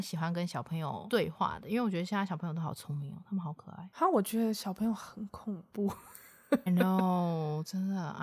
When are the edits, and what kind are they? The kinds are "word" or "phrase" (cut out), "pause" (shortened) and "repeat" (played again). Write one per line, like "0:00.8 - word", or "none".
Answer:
0:06.7 - word